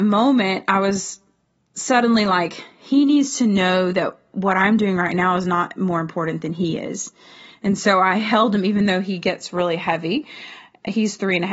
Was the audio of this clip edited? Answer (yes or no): no